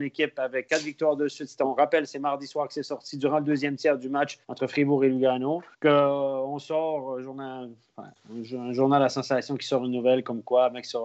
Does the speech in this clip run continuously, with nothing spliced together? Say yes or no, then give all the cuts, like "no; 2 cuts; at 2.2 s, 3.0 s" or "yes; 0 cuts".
no; 2 cuts; at 4.4 s, 5.7 s